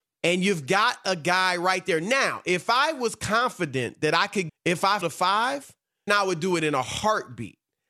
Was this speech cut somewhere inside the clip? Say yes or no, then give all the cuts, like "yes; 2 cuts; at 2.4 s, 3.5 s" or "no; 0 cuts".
yes; 3 cuts; at 4.5 s, 5.0 s, 6.1 s